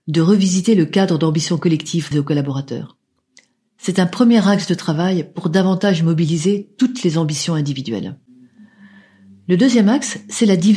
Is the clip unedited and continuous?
no; 1 cut; at 2.1 s

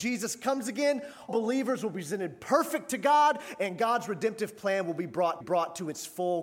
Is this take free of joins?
no; 2 cuts; at 1.3 s, 5.4 s

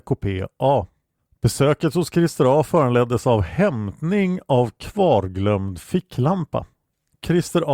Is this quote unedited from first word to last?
yes; 0 cuts

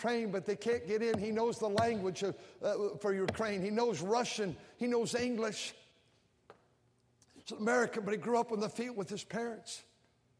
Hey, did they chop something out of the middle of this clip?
no; 0 cuts

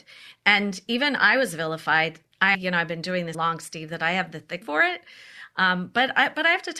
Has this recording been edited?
yes; 3 cuts; at 2.5 s, 3.3 s, 4.6 s

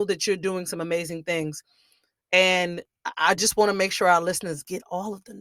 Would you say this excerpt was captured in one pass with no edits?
yes; 0 cuts

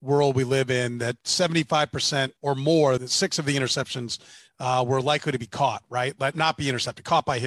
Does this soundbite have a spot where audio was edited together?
yes; 3 cuts; at 2.4 s, 3.0 s, 6.3 s

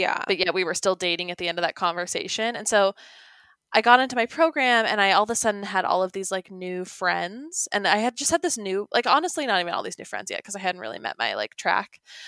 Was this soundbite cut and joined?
no; 0 cuts

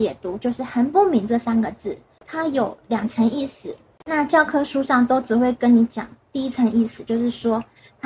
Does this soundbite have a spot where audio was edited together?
no; 0 cuts

